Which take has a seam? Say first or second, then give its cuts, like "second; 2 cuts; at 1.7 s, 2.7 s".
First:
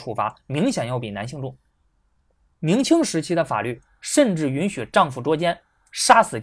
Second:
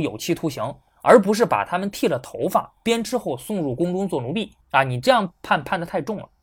second; 1 cut; at 4.6 s